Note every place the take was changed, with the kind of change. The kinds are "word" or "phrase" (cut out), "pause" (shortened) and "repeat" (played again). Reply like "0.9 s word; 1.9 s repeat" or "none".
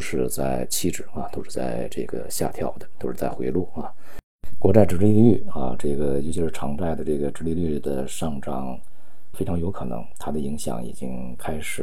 9.3 s word